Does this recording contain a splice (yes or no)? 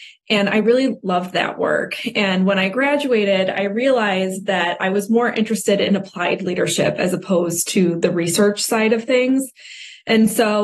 no